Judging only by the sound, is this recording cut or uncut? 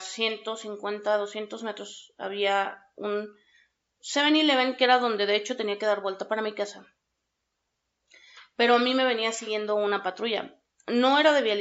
uncut